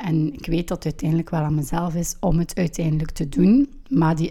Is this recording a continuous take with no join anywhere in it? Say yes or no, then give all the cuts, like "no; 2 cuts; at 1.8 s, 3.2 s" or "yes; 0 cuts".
yes; 0 cuts